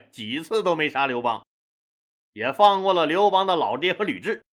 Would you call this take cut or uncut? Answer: uncut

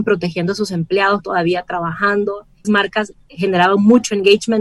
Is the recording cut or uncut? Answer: cut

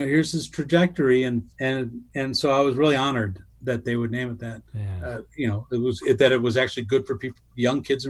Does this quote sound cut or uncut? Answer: cut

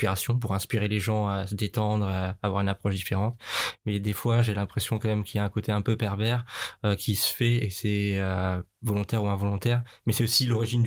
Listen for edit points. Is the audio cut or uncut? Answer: uncut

